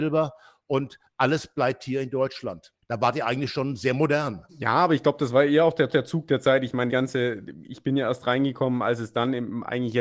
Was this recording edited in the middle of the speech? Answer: yes; 4 cuts; at 2.8 s, 4.5 s, 5.9 s, 6.9 s

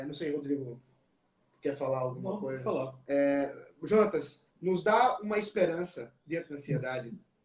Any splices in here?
yes; 1 cut; at 4.5 s

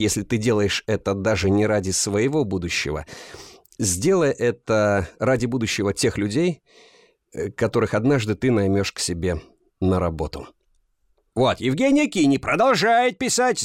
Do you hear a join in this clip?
no; 0 cuts

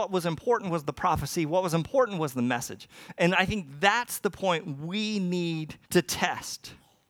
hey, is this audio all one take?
no; 1 cut; at 5.8 s

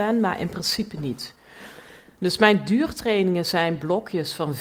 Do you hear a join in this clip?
no; 0 cuts

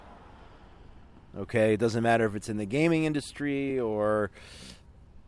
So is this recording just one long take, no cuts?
yes; 0 cuts

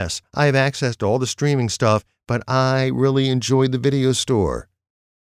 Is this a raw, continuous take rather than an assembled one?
yes; 0 cuts

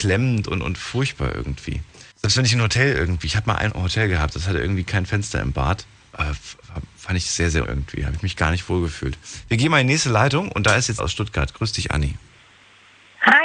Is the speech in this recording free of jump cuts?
no; 4 cuts; at 2.1 s, 3.7 s, 7.6 s, 11.0 s

